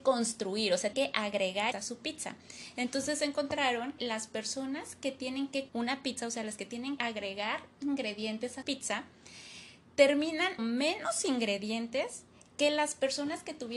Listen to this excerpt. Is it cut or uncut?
cut